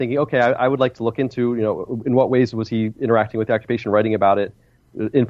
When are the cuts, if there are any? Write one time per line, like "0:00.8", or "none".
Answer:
none